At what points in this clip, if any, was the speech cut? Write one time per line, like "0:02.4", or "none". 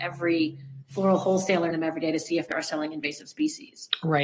0:01.7
0:02.5